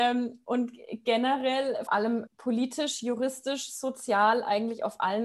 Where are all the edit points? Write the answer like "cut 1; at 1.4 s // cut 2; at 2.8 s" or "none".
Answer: cut 1; at 1.9 s // cut 2; at 2.3 s